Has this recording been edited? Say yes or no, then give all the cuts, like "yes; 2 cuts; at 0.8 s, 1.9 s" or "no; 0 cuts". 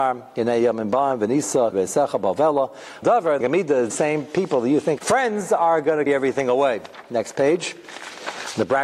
yes; 6 cuts; at 1.7 s, 3.0 s, 3.4 s, 3.9 s, 5.0 s, 6.1 s